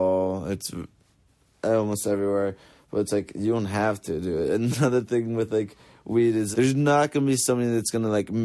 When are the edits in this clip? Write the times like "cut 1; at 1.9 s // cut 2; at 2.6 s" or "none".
cut 1; at 4.7 s // cut 2; at 6.5 s